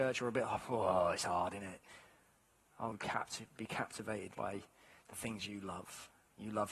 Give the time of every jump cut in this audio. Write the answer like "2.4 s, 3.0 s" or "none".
2.9 s, 4.3 s